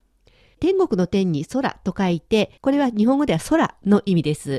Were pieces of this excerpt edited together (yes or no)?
yes